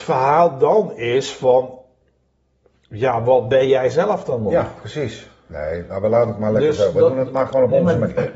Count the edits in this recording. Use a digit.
0